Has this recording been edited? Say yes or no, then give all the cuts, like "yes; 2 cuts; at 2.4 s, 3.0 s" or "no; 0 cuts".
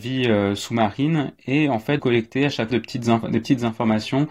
yes; 2 cuts; at 2.0 s, 2.7 s